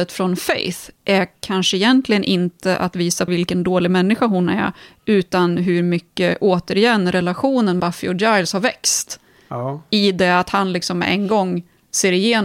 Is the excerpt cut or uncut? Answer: cut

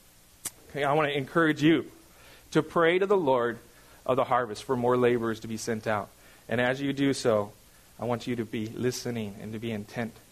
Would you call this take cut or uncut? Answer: uncut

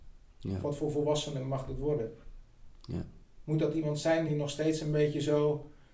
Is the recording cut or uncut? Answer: uncut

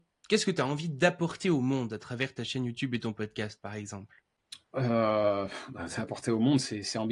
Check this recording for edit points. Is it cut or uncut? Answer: cut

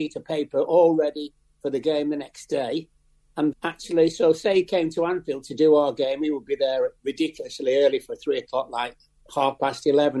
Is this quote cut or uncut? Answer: cut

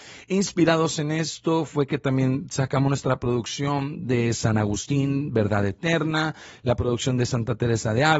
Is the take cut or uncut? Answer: uncut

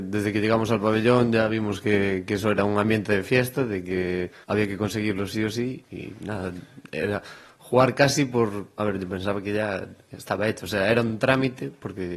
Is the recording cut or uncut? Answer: cut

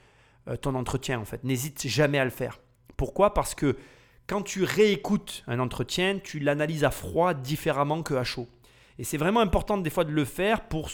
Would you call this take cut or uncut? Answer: uncut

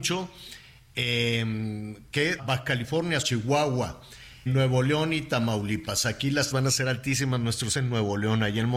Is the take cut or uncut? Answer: cut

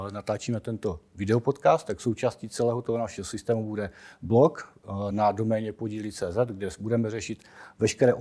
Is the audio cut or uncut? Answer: uncut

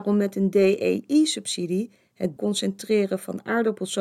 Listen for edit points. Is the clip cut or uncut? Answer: cut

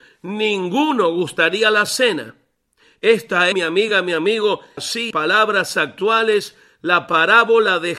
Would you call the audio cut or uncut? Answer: cut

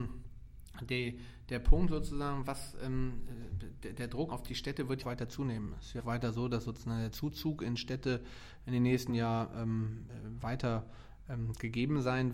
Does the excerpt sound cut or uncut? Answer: cut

